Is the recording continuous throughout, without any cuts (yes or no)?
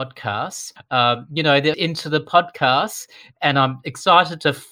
no